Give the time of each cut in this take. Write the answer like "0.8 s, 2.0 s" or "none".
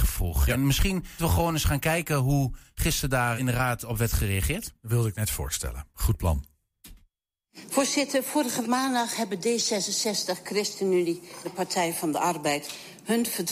1.2 s, 3.4 s, 8.6 s, 11.4 s